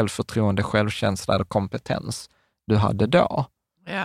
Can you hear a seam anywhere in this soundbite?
no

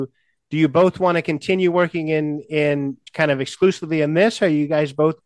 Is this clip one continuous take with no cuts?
no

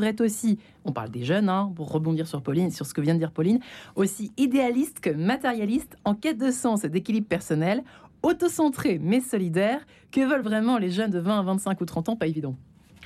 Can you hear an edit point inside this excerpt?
no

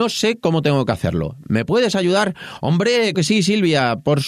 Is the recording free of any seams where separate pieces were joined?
no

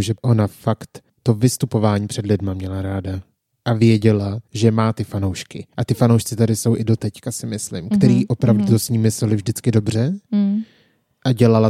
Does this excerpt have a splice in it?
yes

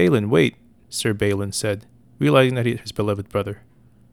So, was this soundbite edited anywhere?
yes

